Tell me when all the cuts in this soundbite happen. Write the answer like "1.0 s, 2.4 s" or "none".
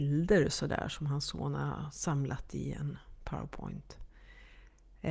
none

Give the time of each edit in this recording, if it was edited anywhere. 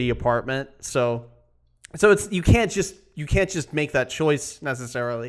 none

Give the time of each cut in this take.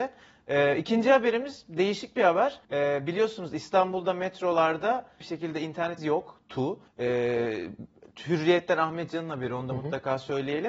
2.6 s, 5.2 s, 6.0 s, 6.9 s

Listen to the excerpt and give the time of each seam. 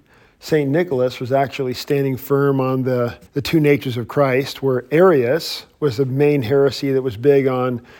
3.3 s

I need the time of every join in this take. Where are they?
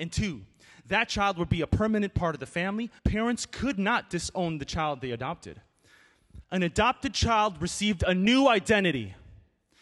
3.0 s, 6.4 s

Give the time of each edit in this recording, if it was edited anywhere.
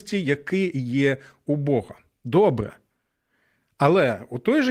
none

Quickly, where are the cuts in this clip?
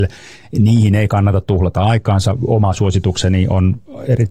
none

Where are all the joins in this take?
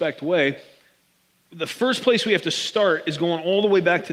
none

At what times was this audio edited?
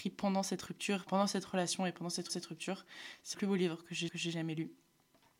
1.1 s, 2.3 s, 3.3 s, 4.1 s

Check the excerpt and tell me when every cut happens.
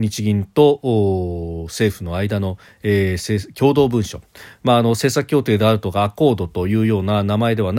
none

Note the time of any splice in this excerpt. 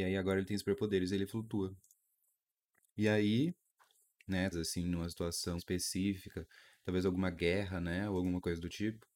4.5 s, 5.6 s

